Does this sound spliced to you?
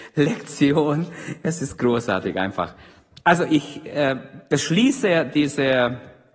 no; 0 cuts

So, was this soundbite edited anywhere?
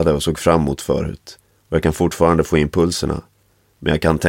no; 0 cuts

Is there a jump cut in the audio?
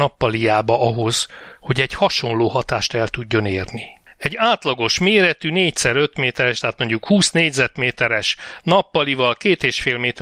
no; 0 cuts

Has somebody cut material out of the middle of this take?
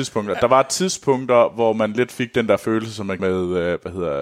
yes; 1 cut; at 3.2 s

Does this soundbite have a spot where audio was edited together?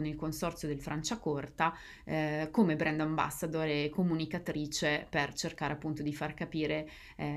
no; 0 cuts

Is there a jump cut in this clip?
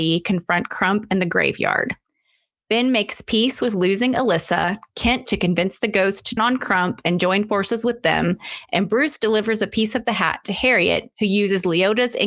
yes; 2 cuts; at 5.3 s, 6.4 s

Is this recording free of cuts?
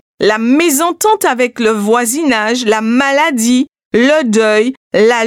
yes; 0 cuts

